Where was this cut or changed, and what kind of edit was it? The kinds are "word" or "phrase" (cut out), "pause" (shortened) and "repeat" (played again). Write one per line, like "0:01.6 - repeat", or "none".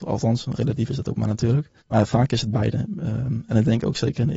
0:01.8 - pause